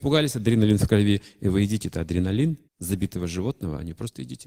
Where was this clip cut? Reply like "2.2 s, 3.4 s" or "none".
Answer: 2.7 s